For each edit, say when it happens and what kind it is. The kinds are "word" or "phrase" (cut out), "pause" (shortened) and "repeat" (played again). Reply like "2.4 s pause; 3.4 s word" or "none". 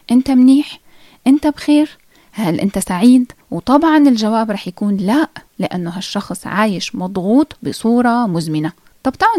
3.4 s pause; 7.6 s word